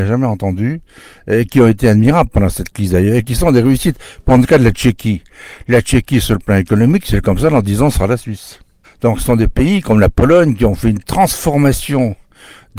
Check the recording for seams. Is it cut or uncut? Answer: cut